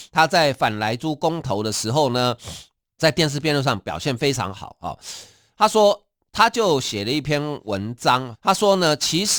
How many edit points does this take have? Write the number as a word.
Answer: two